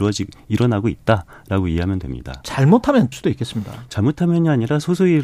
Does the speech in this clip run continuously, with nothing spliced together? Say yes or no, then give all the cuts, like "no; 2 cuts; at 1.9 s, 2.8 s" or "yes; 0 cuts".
no; 1 cut; at 3.1 s